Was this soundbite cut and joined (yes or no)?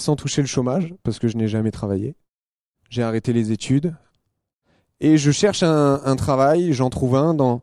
no